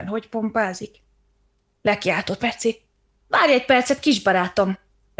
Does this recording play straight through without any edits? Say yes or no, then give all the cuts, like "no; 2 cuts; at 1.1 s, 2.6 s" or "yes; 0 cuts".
no; 1 cut; at 2.4 s